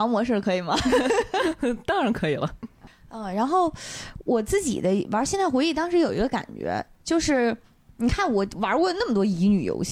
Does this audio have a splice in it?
no; 0 cuts

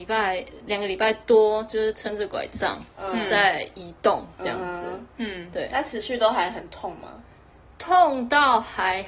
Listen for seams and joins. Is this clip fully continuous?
yes; 0 cuts

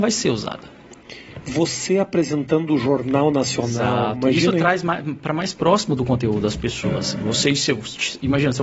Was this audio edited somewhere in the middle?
no; 0 cuts

